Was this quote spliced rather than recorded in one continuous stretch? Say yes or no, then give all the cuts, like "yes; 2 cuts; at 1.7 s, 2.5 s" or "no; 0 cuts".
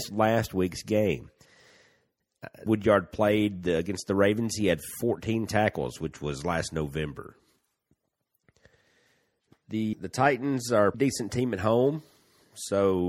yes; 3 cuts; at 2.7 s, 9.9 s, 10.9 s